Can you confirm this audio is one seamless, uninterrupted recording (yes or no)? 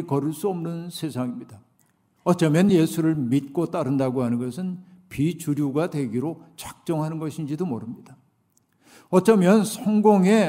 yes